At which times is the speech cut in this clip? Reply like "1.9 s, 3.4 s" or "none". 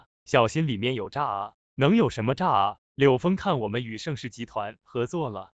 1.6 s